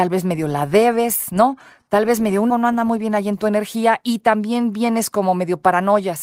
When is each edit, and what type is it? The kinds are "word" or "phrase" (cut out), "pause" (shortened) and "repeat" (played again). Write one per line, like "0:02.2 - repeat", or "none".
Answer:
0:02.5 - word